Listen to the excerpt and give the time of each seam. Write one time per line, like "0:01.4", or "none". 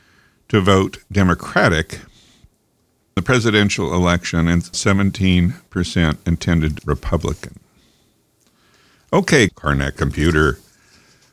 0:03.2
0:04.7
0:06.8
0:09.5
0:10.0